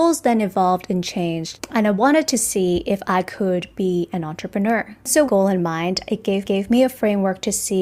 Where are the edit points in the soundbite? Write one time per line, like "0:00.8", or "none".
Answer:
0:05.2
0:06.4